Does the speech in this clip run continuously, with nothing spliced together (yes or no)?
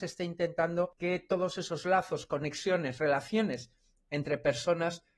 yes